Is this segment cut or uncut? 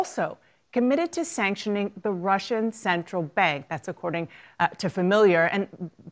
uncut